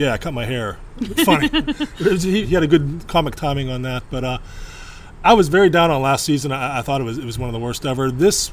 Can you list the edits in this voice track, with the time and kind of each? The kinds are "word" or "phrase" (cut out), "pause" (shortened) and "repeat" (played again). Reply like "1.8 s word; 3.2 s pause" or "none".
1.2 s word; 2.4 s word; 5.2 s word